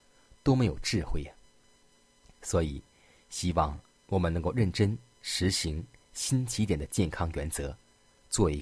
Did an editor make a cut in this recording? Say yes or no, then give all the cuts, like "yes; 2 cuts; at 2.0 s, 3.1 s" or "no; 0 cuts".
no; 0 cuts